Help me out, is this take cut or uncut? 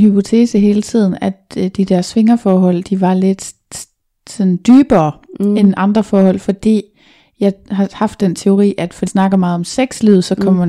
cut